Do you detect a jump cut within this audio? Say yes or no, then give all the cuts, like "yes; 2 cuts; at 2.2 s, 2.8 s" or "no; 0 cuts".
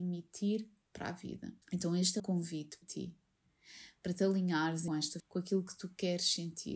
yes; 5 cuts; at 1.6 s, 2.2 s, 2.8 s, 4.9 s, 5.2 s